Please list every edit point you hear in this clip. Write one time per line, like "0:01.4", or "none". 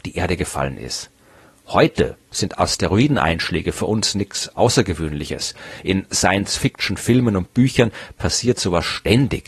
none